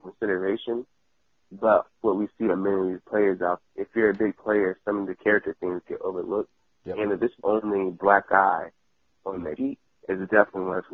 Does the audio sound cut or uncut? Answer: cut